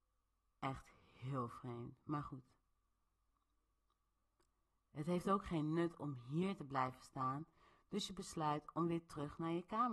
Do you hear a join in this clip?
no; 0 cuts

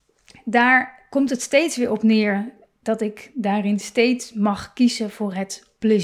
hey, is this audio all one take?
yes; 0 cuts

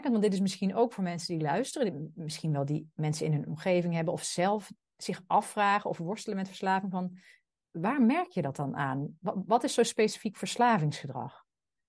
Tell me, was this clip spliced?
no; 0 cuts

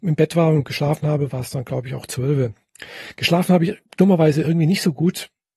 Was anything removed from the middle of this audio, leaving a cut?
yes; 1 cut; at 3.9 s

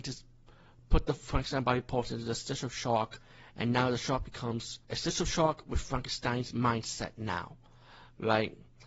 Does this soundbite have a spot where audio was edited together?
yes; 1 cut; at 4.8 s

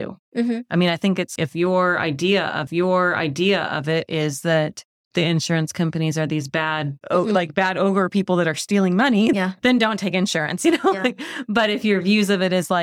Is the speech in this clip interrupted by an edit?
yes; 4 cuts; at 1.4 s, 2.7 s, 7.0 s, 9.3 s

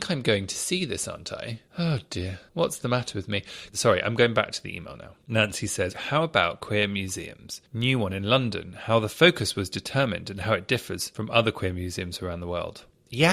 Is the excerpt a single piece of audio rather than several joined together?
no; 5 cuts; at 1.7 s, 2.5 s, 5.2 s, 5.9 s, 7.7 s

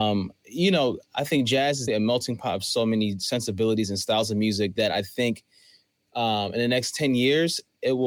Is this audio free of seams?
no; 1 cut; at 1.9 s

